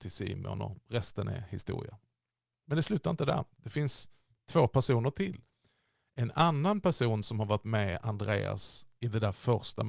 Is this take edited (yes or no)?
no